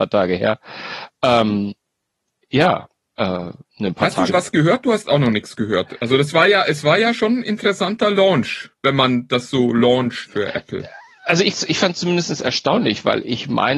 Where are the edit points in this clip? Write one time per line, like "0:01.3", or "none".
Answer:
0:03.7
0:04.3
0:08.7
0:10.2
0:11.5